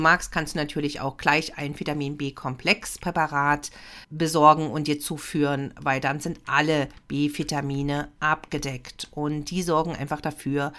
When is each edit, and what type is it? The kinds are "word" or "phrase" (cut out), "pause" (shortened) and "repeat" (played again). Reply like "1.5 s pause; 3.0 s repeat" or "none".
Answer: 4.0 s pause